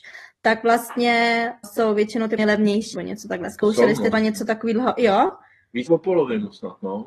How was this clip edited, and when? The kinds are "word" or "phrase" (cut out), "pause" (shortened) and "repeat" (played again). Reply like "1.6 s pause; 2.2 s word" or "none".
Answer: 1.6 s word; 2.4 s word; 2.9 s word; 4.1 s word; 5.9 s word